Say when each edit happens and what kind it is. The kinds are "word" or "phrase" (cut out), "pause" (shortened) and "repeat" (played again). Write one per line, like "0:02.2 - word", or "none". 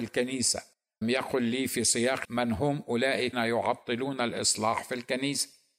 0:01.0 - word
0:02.2 - word
0:03.3 - word